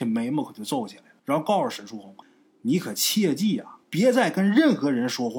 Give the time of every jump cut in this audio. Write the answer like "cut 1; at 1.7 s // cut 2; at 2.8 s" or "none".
cut 1; at 1.2 s // cut 2; at 2.2 s // cut 3; at 3.8 s